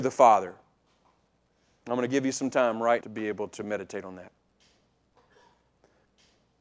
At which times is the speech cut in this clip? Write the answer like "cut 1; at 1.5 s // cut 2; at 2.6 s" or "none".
cut 1; at 3.0 s